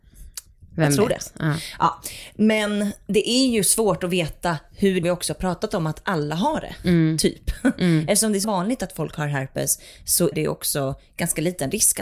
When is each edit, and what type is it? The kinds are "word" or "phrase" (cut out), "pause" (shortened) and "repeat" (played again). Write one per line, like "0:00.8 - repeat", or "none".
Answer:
0:05.0 - phrase
0:08.4 - word
0:10.3 - word